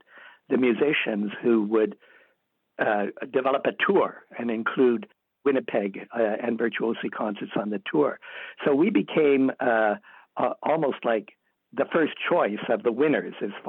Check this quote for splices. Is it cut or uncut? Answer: uncut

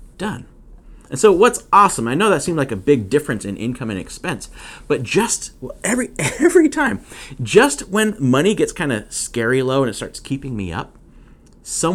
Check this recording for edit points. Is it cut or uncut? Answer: uncut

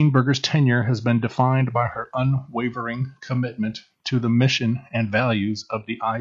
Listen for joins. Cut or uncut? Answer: uncut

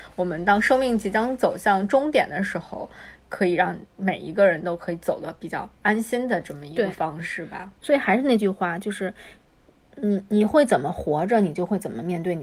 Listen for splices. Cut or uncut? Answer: uncut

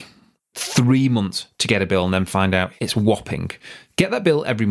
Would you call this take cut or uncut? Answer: uncut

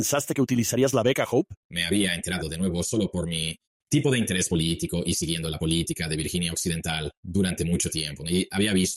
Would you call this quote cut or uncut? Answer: cut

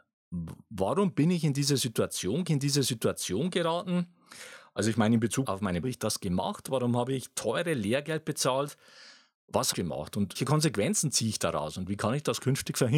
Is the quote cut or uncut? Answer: cut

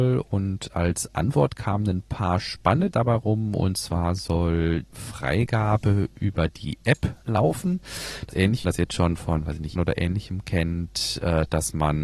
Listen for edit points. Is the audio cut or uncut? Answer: cut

